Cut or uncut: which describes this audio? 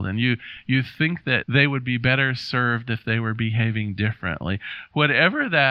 uncut